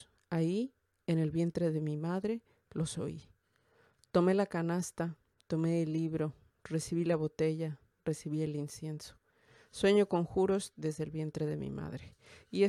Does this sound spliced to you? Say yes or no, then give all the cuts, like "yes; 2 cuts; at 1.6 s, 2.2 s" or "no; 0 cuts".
no; 0 cuts